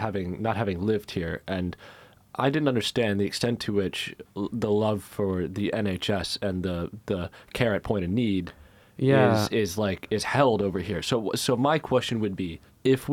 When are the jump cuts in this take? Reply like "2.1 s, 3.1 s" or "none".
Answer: none